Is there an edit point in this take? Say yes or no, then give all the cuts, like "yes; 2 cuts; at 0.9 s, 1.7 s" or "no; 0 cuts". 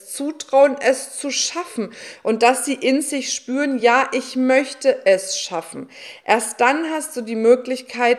no; 0 cuts